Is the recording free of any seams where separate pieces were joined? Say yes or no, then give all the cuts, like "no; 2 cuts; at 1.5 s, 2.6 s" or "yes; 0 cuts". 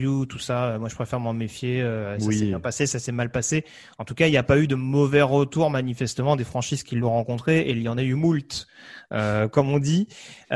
yes; 0 cuts